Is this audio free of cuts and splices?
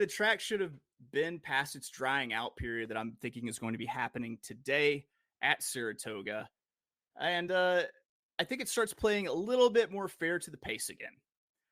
yes; 0 cuts

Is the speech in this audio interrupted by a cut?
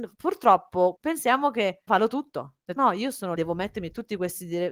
yes; 4 cuts; at 1.0 s, 1.9 s, 2.8 s, 3.4 s

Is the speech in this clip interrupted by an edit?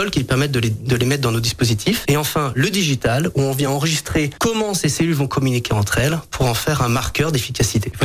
no; 0 cuts

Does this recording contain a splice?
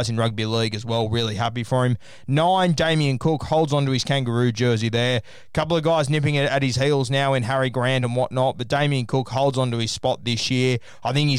no; 0 cuts

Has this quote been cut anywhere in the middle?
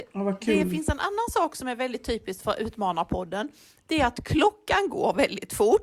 no; 0 cuts

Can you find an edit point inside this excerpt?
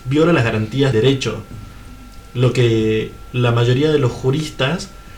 yes; 1 cut; at 0.9 s

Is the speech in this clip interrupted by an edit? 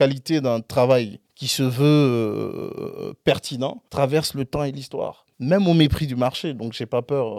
yes; 3 cuts; at 1.3 s, 3.9 s, 5.3 s

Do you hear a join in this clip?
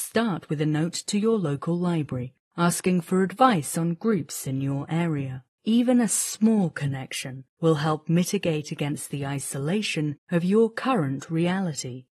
yes; 1 cut; at 5.5 s

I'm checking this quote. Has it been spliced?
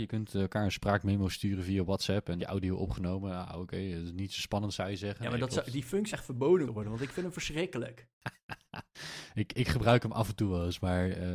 yes; 4 cuts; at 2.4 s, 6.1 s, 6.6 s, 8.1 s

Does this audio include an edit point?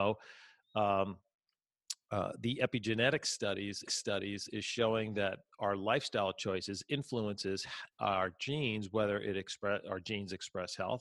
yes; 1 cut; at 3.9 s

